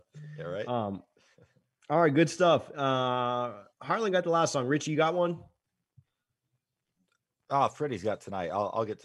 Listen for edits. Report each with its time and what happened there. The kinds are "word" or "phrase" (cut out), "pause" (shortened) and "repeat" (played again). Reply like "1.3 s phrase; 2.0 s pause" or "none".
3.7 s pause